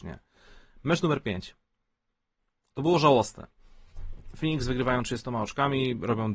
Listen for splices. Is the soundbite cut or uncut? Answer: uncut